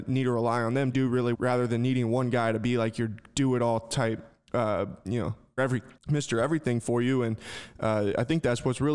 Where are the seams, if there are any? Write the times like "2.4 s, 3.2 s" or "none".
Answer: 0.9 s, 1.3 s, 5.6 s, 6.0 s